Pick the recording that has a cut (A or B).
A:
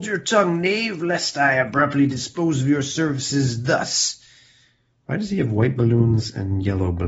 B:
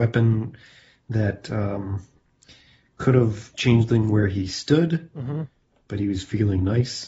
B